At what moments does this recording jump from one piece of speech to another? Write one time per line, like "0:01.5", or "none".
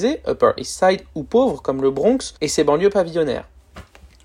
0:02.4